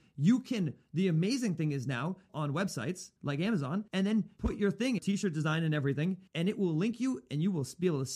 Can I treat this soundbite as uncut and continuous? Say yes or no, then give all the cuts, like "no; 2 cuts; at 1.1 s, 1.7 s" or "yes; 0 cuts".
no; 6 cuts; at 2.3 s, 3.2 s, 3.9 s, 4.4 s, 5.0 s, 6.3 s